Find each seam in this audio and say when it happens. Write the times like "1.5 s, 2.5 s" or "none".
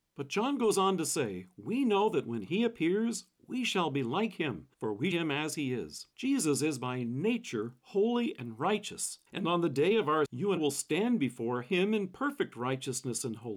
4.7 s, 5.1 s, 6.1 s, 9.3 s, 10.3 s, 10.6 s

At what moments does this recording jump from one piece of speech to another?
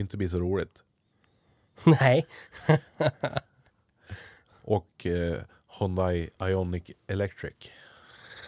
none

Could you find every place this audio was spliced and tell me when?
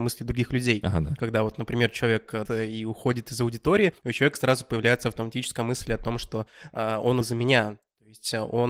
2.5 s, 4.0 s, 7.2 s

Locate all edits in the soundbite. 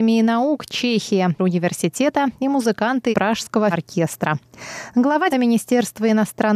1.4 s, 3.1 s, 3.7 s, 5.3 s

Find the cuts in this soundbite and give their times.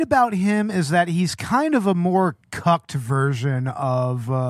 none

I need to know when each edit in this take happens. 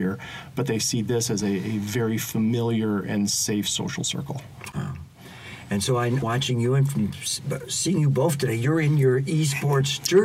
6.2 s

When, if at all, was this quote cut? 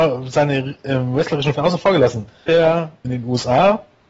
1.5 s, 2.5 s, 3.0 s

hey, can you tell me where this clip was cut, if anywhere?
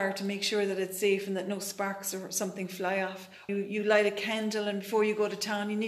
3.5 s

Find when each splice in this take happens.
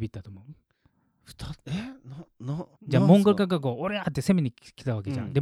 2.7 s

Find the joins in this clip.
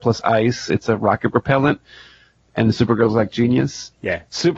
none

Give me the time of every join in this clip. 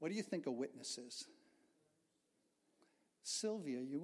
none

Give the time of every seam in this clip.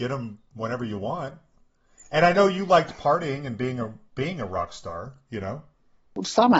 none

